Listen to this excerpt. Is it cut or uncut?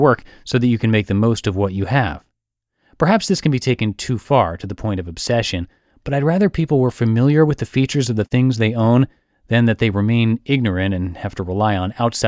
uncut